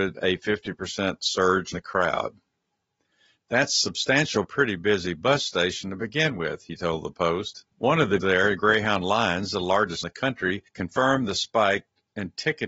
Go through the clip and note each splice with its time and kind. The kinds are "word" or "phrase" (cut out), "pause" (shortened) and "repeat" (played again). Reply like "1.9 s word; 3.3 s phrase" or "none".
1.7 s word; 4.4 s phrase; 7.7 s pause; 8.2 s phrase; 10.0 s word; 10.7 s pause